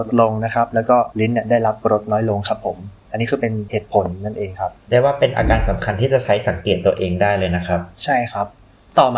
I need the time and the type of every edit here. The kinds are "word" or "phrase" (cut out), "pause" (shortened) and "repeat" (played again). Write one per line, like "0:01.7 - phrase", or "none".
0:04.8 - pause
0:07.9 - pause